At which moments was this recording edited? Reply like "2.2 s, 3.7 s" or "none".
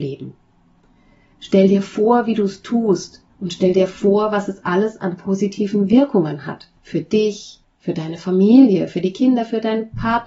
3.3 s, 7.6 s